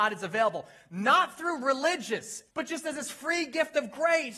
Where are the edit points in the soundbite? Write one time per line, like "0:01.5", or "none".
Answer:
0:02.5